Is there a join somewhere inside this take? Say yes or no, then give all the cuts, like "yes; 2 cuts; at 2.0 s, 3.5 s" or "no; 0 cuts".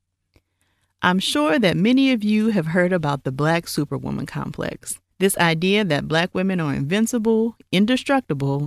yes; 1 cut; at 5.1 s